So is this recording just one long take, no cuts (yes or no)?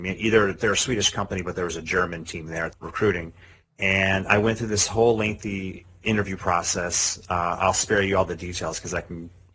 no